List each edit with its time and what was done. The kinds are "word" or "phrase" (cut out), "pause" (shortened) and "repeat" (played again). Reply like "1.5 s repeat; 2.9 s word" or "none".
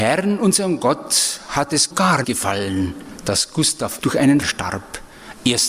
1.9 s phrase; 2.2 s word; 4.0 s word; 4.4 s word